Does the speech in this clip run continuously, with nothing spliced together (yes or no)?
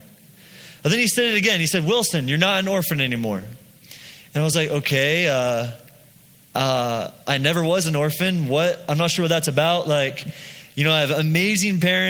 yes